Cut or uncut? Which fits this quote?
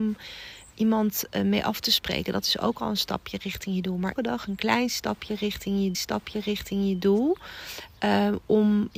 cut